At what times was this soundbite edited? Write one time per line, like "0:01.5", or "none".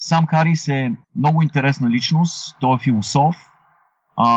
0:01.0